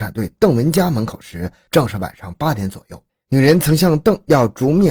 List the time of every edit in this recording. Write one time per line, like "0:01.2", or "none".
0:03.1